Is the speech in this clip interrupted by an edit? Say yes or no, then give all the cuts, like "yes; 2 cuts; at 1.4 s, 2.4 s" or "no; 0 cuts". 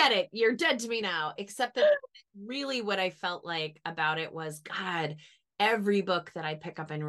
no; 0 cuts